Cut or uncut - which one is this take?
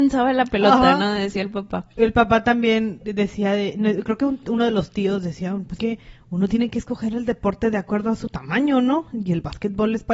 cut